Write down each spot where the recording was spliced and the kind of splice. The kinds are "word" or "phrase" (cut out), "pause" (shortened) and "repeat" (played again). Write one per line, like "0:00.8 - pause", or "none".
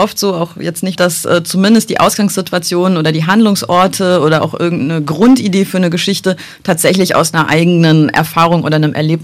0:00.9 - phrase